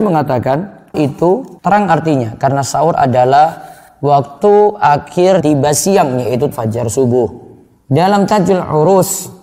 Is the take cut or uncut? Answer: cut